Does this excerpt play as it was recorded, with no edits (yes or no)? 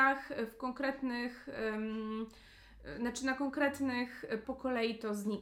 no